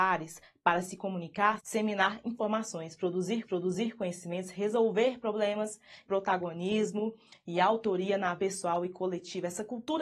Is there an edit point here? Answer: yes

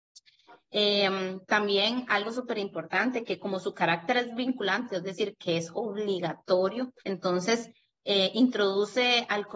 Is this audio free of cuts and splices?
no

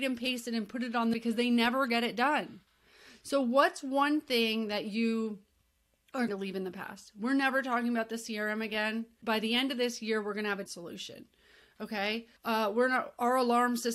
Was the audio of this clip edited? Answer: yes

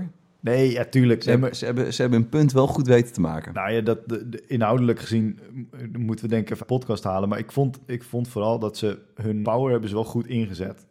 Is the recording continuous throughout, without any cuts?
no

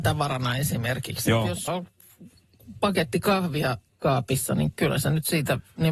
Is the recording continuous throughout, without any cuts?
no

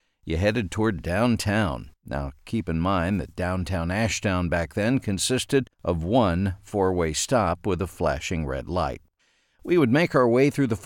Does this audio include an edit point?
yes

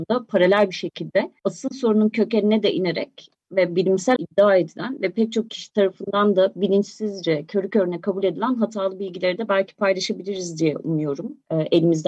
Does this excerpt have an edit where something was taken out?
yes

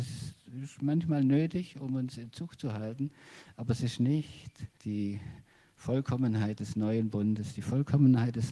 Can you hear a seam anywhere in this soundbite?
yes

